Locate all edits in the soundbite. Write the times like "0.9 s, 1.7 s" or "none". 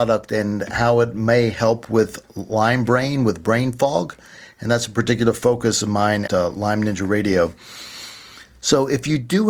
6.3 s

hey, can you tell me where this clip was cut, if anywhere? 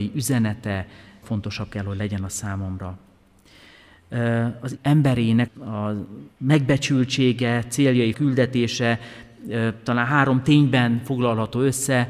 1.2 s, 4.8 s, 5.5 s, 6.3 s, 8.1 s

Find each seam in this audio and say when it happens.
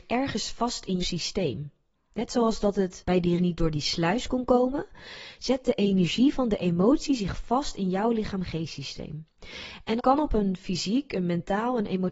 1.0 s, 3.4 s, 10.0 s

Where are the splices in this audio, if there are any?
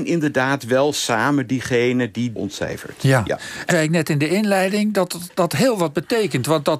2.4 s, 3.7 s

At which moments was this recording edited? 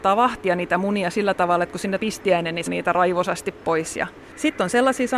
2.0 s, 2.7 s

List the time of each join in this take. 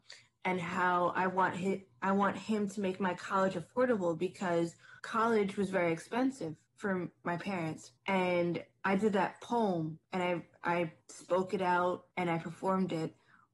5.0 s, 6.7 s, 8.0 s, 10.0 s, 11.0 s, 12.1 s

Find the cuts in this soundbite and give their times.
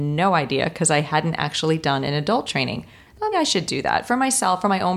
3.3 s

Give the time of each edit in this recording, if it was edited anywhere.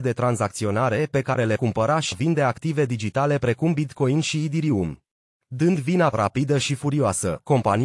1.6 s, 2.1 s, 5.3 s, 6.1 s

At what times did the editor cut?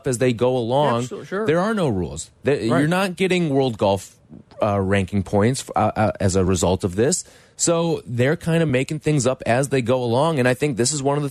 none

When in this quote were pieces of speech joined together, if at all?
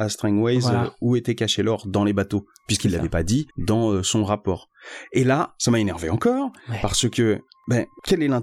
3.5 s

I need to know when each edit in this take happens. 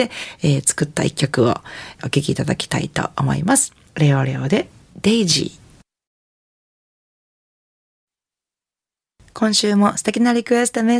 none

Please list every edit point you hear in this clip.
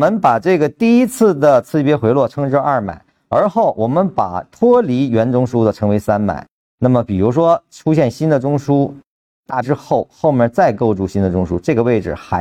9.6 s

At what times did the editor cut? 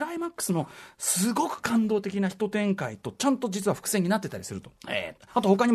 4.8 s

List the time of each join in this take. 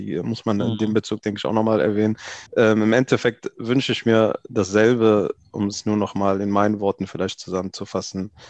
2.5 s

